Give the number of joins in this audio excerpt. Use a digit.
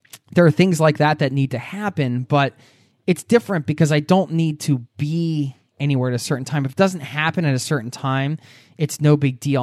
0